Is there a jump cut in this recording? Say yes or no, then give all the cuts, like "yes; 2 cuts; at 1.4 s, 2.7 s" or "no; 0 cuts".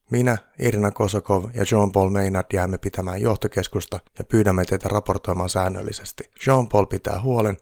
yes; 2 cuts; at 4.1 s, 6.4 s